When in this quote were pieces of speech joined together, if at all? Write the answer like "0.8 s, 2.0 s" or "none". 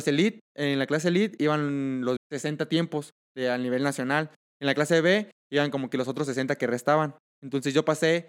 2.2 s

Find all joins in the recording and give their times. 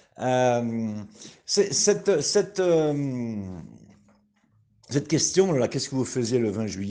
none

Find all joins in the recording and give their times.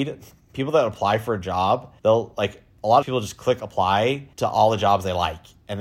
2.0 s, 3.0 s, 4.3 s

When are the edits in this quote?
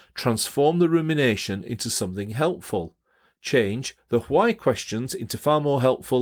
none

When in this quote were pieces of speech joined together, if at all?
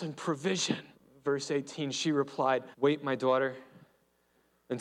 0.9 s, 2.7 s

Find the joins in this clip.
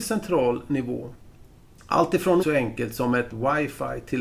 2.4 s, 3.3 s

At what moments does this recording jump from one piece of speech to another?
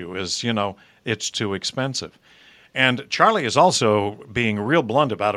1.3 s

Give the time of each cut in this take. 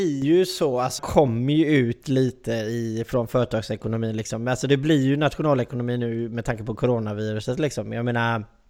1.0 s

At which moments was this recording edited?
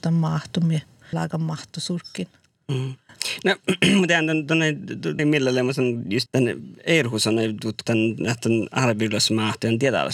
1.1 s, 5.2 s, 6.3 s, 7.9 s

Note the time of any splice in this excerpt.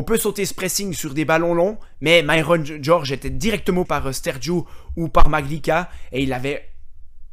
3.9 s

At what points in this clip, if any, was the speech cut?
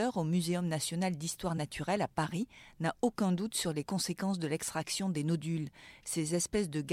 none

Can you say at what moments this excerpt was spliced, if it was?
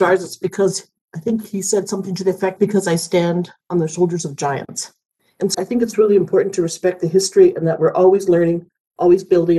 2.6 s, 5.5 s

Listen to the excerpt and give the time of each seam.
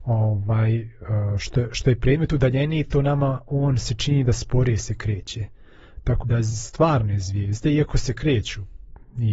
6.2 s

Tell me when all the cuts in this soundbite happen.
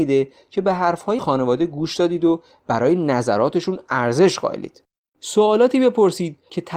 1.2 s

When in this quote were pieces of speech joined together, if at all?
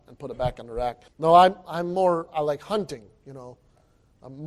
1.1 s

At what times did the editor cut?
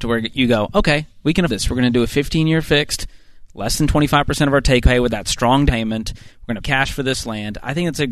1.5 s, 4.8 s, 5.7 s, 6.6 s

